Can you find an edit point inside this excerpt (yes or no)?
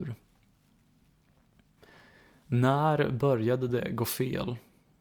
no